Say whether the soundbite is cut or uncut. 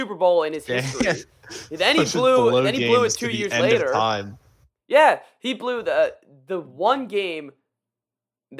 uncut